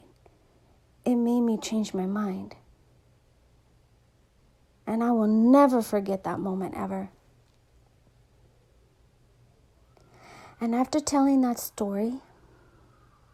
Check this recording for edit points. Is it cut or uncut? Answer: uncut